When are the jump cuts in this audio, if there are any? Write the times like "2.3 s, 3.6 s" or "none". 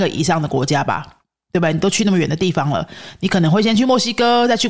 none